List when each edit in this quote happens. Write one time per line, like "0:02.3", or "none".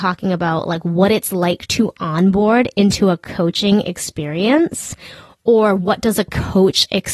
none